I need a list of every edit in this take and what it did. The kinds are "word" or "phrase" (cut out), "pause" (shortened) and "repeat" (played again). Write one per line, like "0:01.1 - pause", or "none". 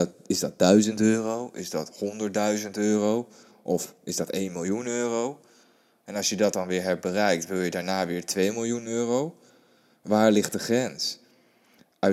none